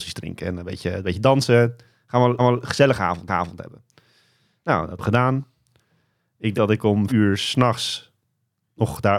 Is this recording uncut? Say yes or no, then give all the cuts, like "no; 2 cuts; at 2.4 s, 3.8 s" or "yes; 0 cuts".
no; 5 cuts; at 2.4 s, 3.3 s, 5.0 s, 6.5 s, 7.1 s